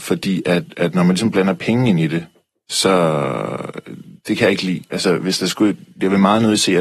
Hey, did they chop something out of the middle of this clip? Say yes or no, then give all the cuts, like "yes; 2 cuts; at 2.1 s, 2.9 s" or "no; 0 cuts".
no; 0 cuts